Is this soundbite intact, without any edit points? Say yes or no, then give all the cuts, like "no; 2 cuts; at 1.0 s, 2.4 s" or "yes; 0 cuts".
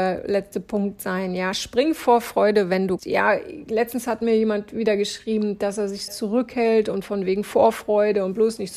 no; 2 cuts; at 3.0 s, 6.1 s